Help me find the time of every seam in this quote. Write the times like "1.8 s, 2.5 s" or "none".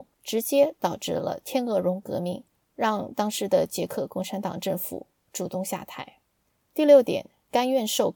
none